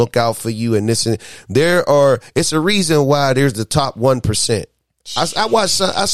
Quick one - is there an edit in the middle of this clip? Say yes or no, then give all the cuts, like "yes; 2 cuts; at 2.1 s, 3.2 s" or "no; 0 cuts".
no; 0 cuts